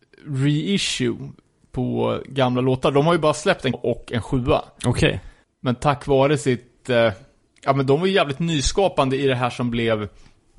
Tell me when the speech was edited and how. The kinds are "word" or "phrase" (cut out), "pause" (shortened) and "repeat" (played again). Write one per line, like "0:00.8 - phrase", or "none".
0:03.7 - word

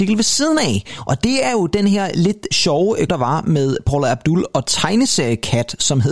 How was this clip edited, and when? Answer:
0:03.1 - word
0:04.6 - word

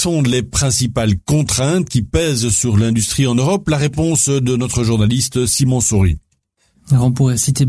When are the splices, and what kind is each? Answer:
none

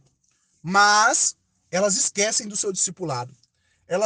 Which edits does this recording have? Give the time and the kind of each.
none

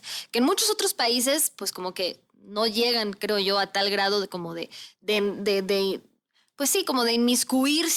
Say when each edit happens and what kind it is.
none

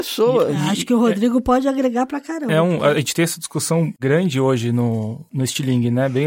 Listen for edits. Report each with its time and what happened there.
none

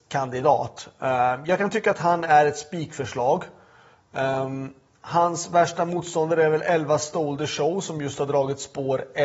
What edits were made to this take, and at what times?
none

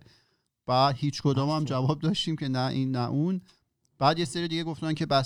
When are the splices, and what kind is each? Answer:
none

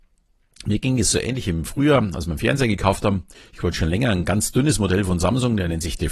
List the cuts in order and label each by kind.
0:03.3 - pause

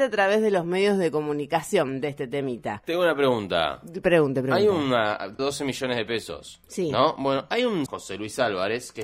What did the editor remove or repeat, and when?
0:05.4 - phrase
0:06.6 - pause
0:07.9 - phrase

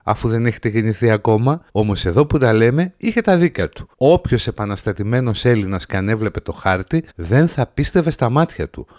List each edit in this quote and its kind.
0:01.7 - pause
0:03.9 - pause
0:07.1 - pause

